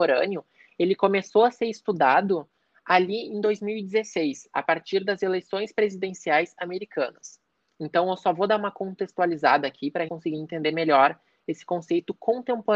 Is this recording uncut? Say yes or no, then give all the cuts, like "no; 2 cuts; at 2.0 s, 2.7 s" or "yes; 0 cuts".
no; 1 cut; at 10.1 s